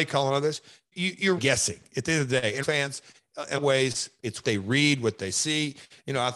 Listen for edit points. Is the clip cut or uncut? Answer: cut